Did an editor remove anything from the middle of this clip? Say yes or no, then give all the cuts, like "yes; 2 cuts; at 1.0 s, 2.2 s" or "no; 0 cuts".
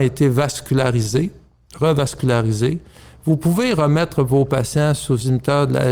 no; 0 cuts